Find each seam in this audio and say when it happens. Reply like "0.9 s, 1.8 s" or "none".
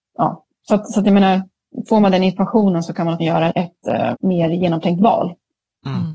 3.2 s, 3.5 s, 4.1 s